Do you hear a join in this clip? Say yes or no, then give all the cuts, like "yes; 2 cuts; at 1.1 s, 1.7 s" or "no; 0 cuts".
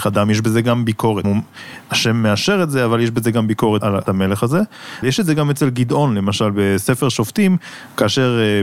yes; 3 cuts; at 1.2 s, 4.0 s, 5.0 s